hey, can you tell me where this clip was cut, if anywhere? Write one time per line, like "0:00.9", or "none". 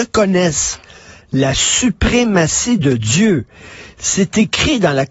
none